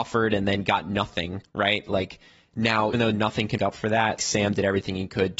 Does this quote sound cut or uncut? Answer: cut